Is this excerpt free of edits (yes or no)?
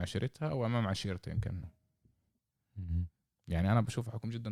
no